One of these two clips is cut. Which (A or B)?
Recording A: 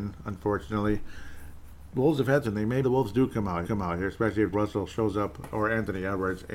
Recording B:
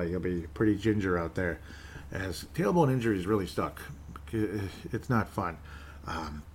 A